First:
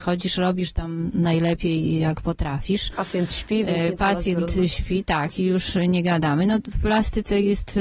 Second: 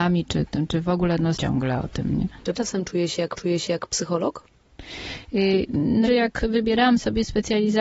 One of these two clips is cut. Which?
second; 4 cuts; at 1.4 s, 2.5 s, 3.4 s, 6.0 s

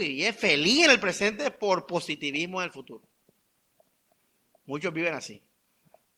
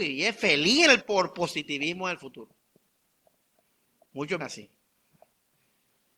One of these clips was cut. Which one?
second; 2 cuts; at 1.0 s, 4.4 s

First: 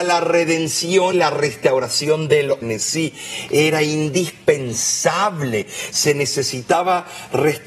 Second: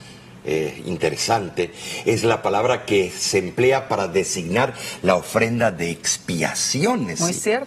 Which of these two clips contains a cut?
first; 2 cuts; at 1.1 s, 2.6 s

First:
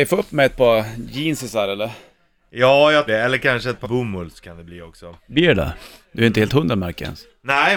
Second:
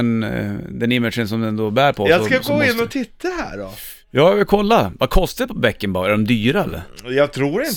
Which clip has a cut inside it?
first; 2 cuts; at 3.1 s, 3.8 s

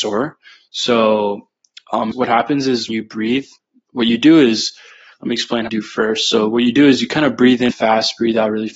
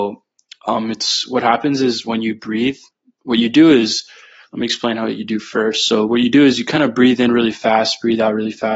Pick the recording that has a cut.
first; 4 cuts; at 2.1 s, 2.9 s, 5.7 s, 7.7 s

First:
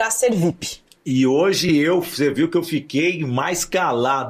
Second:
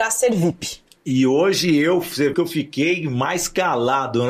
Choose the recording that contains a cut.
second; 1 cut; at 2.3 s

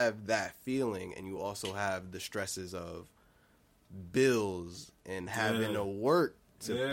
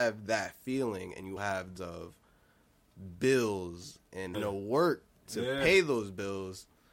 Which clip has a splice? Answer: second; 3 cuts; at 1.4 s, 1.8 s, 4.3 s

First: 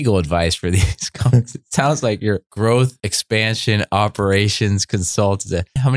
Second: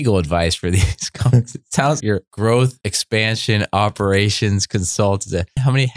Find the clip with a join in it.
second; 1 cut; at 2.0 s

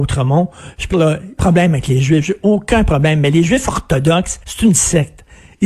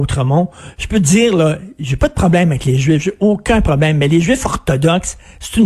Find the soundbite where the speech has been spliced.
first; 3 cuts; at 0.9 s, 1.4 s, 4.4 s

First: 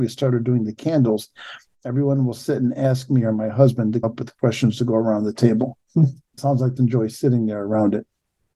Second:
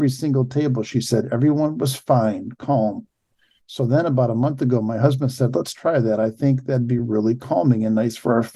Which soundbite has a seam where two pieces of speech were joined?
first; 3 cuts; at 4.0 s, 6.4 s, 6.8 s

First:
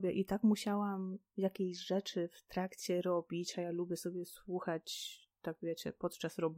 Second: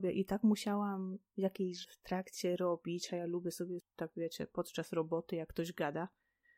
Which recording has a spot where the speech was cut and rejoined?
second; 2 cuts; at 1.8 s, 3.8 s

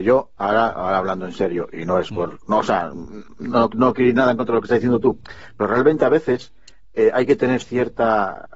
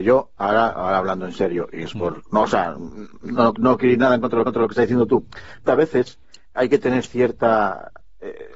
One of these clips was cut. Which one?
second; 4 cuts; at 1.8 s, 4.4 s, 5.7 s, 6.5 s

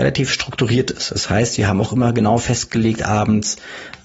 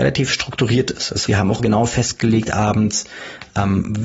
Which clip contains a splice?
second; 2 cuts; at 1.3 s, 1.6 s

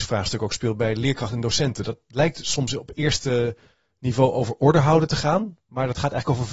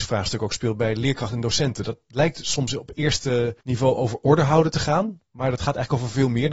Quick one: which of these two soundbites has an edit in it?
second; 1 cut; at 3.6 s

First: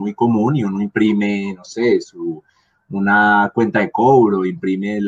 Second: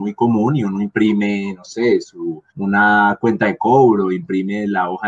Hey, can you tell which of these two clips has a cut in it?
second; 1 cut; at 2.5 s

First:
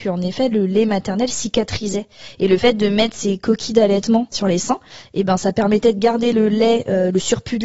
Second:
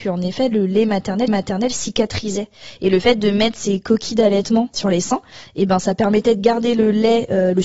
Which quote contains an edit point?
second; 1 cut; at 1.3 s

